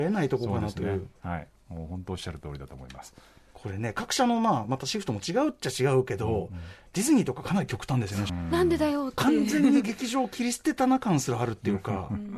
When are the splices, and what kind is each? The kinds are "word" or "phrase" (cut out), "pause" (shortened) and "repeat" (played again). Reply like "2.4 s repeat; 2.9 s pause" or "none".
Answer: 8.3 s phrase